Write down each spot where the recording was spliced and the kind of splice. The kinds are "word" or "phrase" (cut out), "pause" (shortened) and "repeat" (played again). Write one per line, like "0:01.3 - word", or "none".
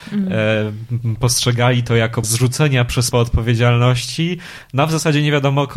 0:02.2 - word
0:03.1 - word